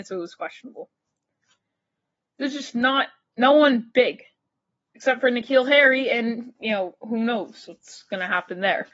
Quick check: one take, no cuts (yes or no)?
yes